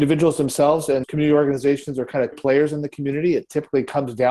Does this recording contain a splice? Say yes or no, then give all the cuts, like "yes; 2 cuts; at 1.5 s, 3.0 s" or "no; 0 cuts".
yes; 2 cuts; at 1.0 s, 2.3 s